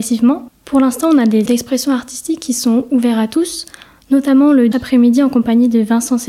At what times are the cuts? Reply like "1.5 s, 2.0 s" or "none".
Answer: 1.5 s, 4.7 s